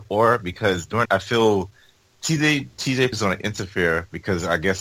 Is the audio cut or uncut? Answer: cut